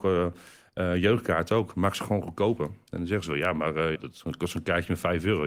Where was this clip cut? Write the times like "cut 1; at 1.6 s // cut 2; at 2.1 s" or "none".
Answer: cut 1; at 4.0 s

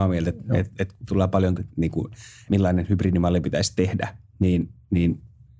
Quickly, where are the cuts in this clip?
cut 1; at 1.1 s // cut 2; at 1.6 s // cut 3; at 2.5 s

